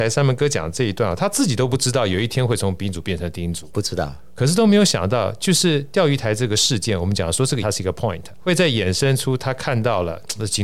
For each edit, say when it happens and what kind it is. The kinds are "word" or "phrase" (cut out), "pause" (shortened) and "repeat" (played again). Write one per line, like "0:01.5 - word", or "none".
0:03.7 - word
0:07.6 - word
0:08.4 - word